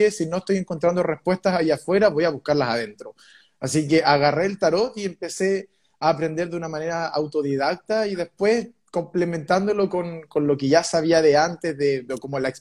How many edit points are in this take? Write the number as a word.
zero